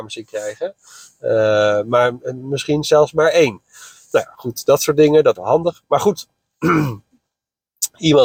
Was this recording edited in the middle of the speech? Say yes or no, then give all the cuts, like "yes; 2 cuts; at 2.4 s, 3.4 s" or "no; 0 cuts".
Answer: yes; 1 cut; at 5.4 s